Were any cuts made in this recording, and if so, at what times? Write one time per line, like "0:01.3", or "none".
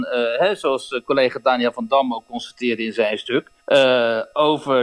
0:03.6

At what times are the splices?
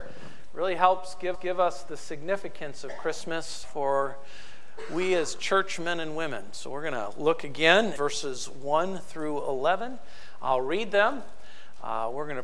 0:01.3
0:03.6
0:07.9

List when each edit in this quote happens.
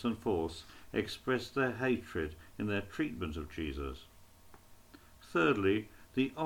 none

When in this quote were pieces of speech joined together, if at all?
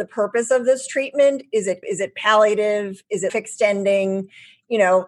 0:01.8
0:03.3

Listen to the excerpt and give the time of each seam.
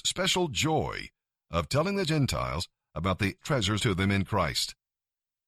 0:03.4
0:03.8

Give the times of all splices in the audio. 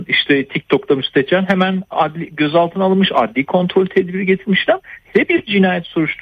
0:05.0

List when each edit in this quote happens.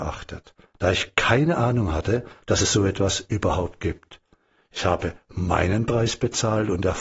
none

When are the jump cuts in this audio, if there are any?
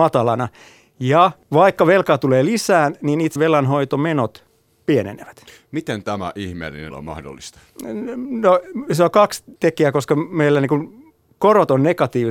0:01.4
0:03.4
0:06.9
0:09.6

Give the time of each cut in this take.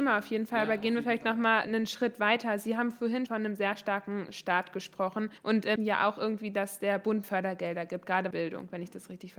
0:01.6
0:03.3
0:05.4
0:05.8
0:07.2
0:08.3

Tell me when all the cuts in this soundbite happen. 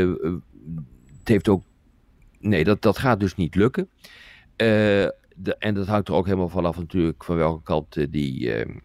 none

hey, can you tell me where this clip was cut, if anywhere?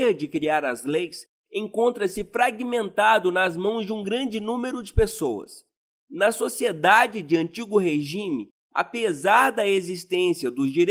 none

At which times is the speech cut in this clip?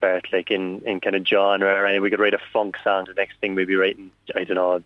0:03.0

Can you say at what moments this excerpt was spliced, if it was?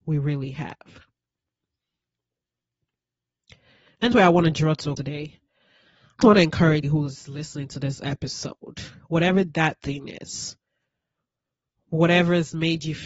0:04.1
0:05.0
0:06.2
0:06.8

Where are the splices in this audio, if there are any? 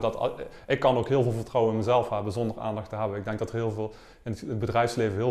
none

